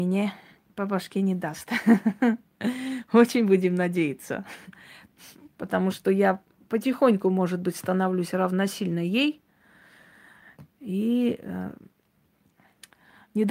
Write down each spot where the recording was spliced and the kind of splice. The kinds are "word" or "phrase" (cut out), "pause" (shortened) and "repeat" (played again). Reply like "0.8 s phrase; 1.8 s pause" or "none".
none

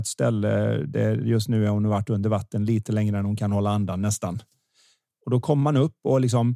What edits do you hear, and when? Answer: none

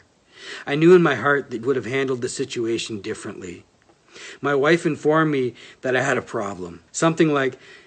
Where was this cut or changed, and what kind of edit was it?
1.6 s word; 6.9 s pause

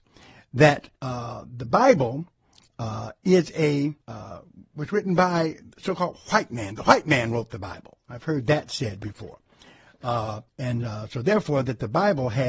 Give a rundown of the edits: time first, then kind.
1.0 s pause; 4.0 s pause; 10.5 s pause

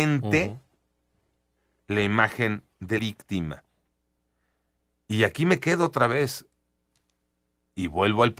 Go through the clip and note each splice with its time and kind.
3.0 s word

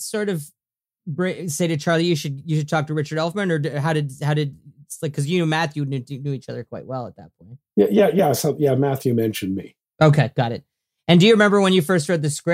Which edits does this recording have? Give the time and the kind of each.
none

